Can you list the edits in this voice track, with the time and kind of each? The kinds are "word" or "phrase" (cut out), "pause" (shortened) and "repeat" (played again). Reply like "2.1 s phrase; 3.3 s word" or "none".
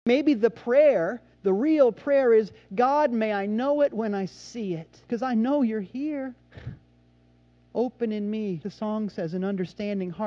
1.3 s pause; 5.0 s pause; 6.4 s pause; 8.6 s phrase